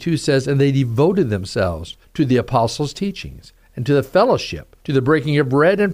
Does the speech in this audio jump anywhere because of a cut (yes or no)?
yes